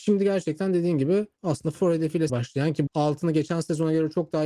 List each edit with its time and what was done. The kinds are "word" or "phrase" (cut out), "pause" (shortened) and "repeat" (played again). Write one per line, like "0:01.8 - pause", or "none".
0:01.8 - word
0:02.3 - word
0:02.9 - word